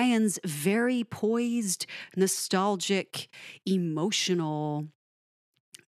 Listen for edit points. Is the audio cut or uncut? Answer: uncut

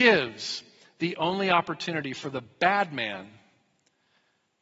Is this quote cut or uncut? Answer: uncut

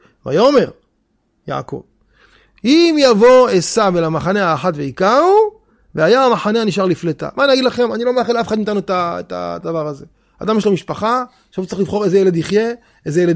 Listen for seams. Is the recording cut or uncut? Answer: uncut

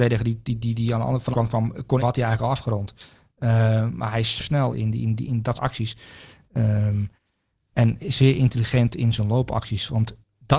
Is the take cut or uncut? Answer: cut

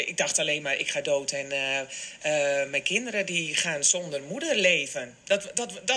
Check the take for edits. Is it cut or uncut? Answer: uncut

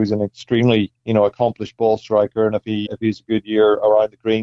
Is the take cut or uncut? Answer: cut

